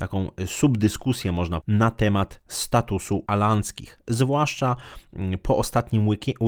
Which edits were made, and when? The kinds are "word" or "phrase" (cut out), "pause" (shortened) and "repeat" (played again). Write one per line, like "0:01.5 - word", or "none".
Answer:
0:01.6 - word
0:03.3 - word